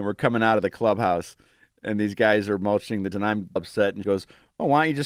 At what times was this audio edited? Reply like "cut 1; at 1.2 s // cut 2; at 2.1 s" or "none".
cut 1; at 3.1 s // cut 2; at 3.6 s // cut 3; at 4.0 s